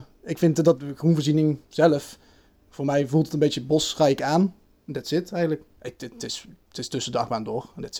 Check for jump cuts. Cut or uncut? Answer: cut